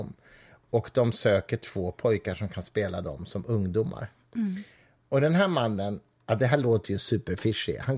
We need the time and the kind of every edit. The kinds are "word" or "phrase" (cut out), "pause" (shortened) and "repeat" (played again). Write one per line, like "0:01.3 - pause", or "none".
none